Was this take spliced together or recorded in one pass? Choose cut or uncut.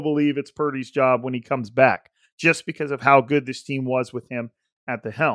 uncut